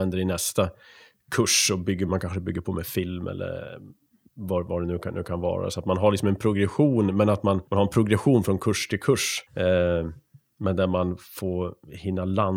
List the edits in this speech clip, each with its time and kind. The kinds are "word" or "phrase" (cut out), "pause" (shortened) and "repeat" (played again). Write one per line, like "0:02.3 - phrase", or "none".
0:07.7 - pause
0:09.5 - pause